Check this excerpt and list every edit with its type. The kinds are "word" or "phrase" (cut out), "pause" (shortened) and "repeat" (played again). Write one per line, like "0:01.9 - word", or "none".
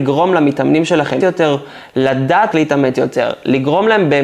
0:01.2 - word
0:02.5 - word